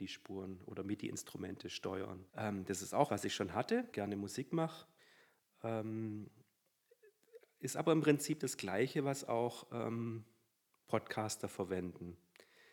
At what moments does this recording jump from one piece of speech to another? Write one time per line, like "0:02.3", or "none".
0:02.3
0:03.1
0:03.9